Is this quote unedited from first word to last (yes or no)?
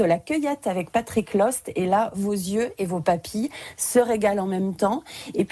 yes